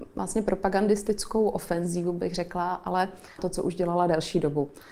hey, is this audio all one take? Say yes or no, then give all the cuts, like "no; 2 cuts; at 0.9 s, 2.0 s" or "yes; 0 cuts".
no; 1 cut; at 3.4 s